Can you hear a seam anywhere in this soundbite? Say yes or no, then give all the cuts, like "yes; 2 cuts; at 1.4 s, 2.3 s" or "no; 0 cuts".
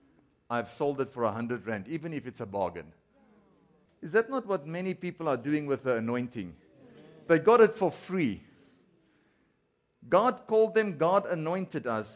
no; 0 cuts